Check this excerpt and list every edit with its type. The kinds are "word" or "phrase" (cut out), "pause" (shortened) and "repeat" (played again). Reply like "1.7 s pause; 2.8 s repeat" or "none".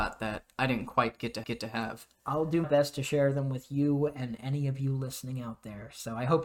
1.4 s repeat; 2.6 s word